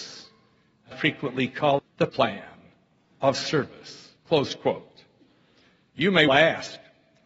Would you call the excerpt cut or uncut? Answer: cut